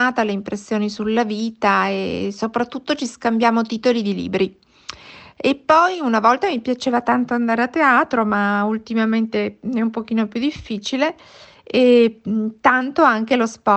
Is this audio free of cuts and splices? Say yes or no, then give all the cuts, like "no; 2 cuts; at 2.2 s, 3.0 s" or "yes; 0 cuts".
yes; 0 cuts